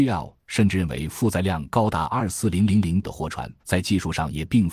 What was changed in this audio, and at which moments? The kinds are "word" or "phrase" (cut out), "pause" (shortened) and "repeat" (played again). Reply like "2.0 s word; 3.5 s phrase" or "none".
3.0 s word; 3.6 s pause